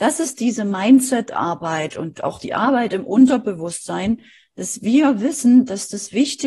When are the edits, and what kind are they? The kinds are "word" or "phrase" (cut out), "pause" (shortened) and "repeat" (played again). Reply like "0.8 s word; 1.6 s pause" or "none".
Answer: none